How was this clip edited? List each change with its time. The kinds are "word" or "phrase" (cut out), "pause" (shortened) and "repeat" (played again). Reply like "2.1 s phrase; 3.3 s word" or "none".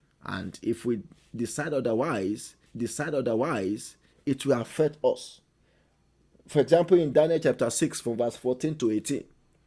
2.7 s repeat